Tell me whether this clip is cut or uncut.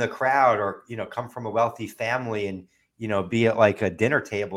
uncut